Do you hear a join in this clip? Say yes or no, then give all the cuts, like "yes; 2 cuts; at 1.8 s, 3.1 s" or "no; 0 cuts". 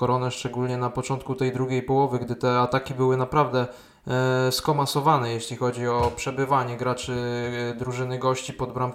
no; 0 cuts